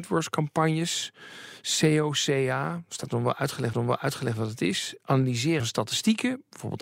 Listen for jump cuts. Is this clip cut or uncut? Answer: cut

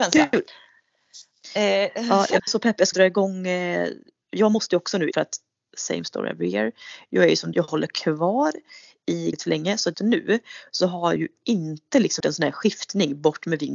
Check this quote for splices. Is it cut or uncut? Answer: cut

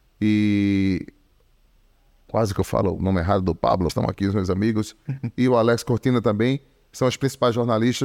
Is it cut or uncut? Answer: cut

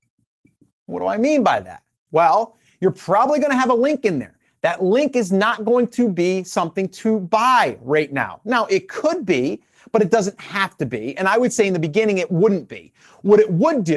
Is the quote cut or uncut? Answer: uncut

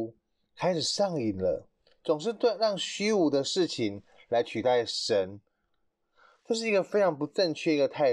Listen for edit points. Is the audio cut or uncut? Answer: uncut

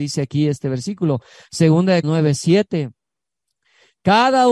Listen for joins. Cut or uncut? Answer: cut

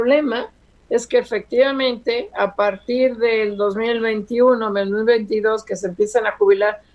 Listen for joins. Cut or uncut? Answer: uncut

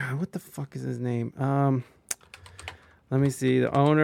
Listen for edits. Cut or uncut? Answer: uncut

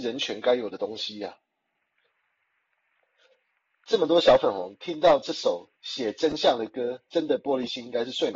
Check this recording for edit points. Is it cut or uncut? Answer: cut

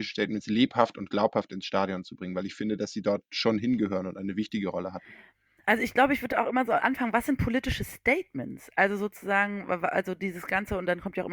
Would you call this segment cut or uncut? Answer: uncut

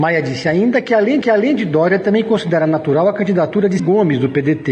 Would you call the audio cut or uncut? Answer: cut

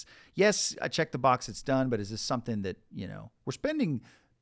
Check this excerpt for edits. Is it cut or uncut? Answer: uncut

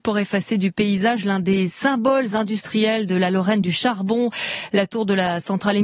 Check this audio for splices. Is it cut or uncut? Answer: uncut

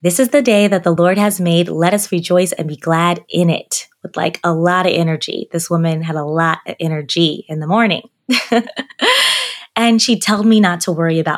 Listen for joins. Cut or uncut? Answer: uncut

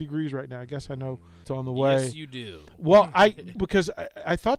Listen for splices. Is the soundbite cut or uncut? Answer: cut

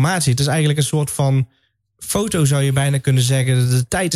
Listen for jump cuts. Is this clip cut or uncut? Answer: uncut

